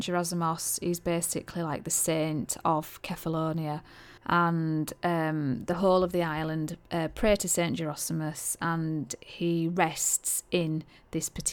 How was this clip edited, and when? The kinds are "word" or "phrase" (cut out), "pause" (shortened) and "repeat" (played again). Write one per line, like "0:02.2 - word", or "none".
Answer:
0:04.2 - pause

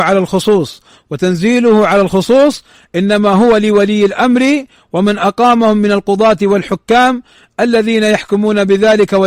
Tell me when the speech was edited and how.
none

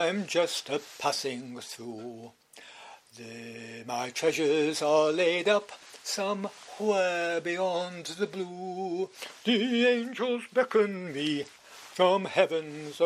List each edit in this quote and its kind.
0:11.5 - pause

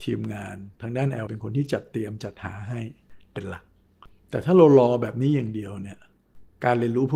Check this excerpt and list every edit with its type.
0:01.3 - word

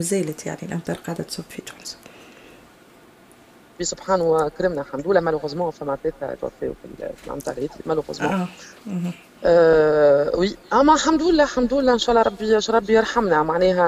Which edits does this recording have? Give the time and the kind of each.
0:06.4 - word

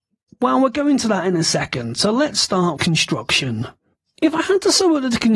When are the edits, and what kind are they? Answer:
0:02.8 - word

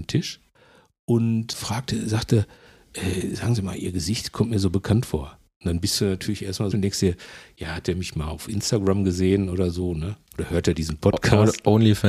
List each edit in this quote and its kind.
0:06.7 - phrase

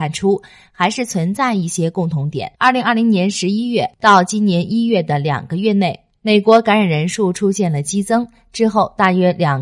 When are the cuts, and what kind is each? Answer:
0:02.6 - pause

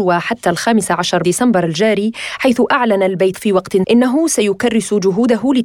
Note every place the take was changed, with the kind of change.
0:01.2 - word
0:03.3 - word
0:03.8 - word

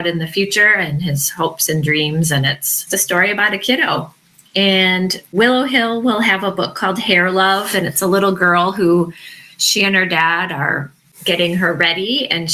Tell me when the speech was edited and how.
none

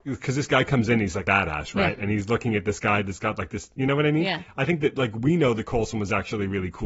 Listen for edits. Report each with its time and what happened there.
0:01.2 - phrase

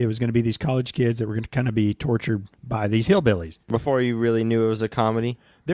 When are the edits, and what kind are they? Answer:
0:02.5 - pause
0:03.6 - pause

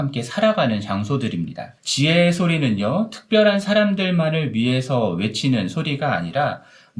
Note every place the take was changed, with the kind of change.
0:01.8 - pause

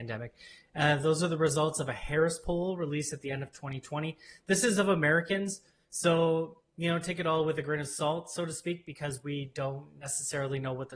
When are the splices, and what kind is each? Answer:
none

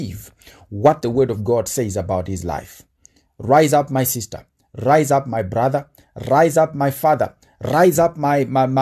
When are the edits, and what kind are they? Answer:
none

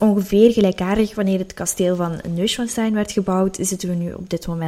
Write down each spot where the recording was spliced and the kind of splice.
none

